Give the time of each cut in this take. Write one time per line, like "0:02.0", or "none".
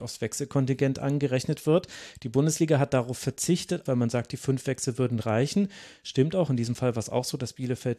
0:03.9